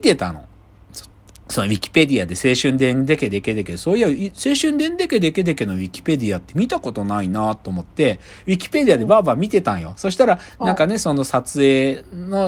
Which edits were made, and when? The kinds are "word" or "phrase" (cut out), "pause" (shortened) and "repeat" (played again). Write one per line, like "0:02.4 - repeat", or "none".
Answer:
none